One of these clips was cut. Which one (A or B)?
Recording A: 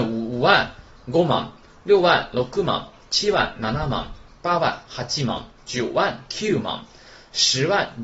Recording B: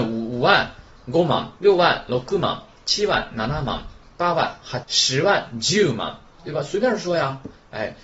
B